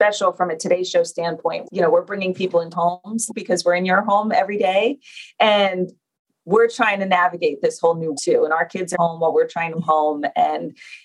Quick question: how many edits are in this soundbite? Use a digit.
6